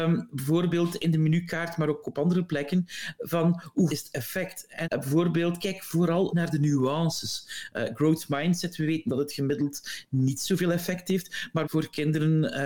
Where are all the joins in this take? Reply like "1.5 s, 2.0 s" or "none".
3.9 s, 4.8 s, 6.3 s, 11.6 s